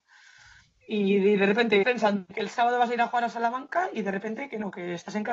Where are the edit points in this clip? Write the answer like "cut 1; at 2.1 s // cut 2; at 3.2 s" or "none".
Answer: cut 1; at 1.8 s // cut 2; at 2.3 s